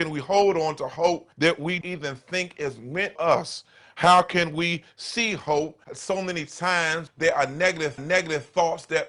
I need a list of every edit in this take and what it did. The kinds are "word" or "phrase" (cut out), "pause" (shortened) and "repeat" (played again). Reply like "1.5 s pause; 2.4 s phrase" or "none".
1.3 s pause; 1.8 s word; 3.2 s word; 5.8 s pause; 7.1 s word; 8.0 s repeat